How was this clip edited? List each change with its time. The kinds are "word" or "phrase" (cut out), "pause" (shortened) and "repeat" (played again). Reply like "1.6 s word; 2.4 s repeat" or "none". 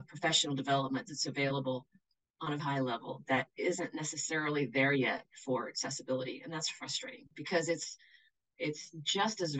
2.6 s word